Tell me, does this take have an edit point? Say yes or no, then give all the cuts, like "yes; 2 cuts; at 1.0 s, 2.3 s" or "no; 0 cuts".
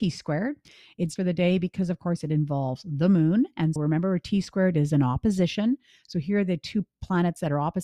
yes; 2 cuts; at 1.2 s, 3.8 s